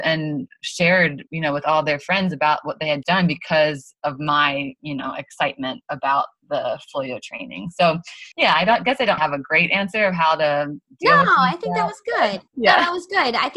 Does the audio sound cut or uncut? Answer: cut